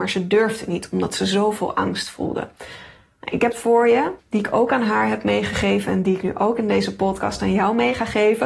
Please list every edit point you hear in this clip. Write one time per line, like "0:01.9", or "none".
0:03.5
0:04.2